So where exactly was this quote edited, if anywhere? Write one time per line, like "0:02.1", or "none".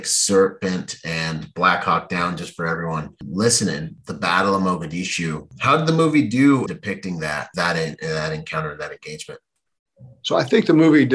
0:06.7